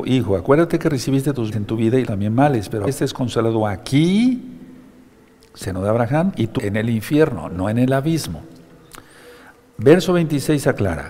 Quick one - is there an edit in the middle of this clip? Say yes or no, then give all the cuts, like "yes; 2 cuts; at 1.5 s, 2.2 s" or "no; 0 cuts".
yes; 4 cuts; at 1.5 s, 2.0 s, 2.9 s, 6.6 s